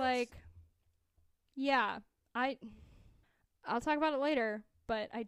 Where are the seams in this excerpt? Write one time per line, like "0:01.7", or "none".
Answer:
0:03.2